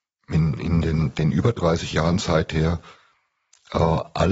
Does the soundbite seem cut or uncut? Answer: uncut